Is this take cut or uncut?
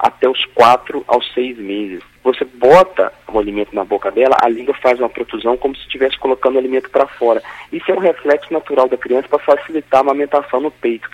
uncut